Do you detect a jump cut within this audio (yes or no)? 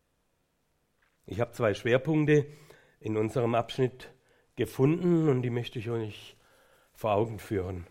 no